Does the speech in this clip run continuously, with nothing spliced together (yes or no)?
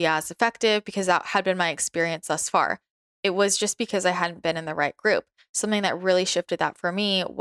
yes